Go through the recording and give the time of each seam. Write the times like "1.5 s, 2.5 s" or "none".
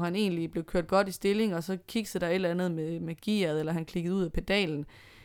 none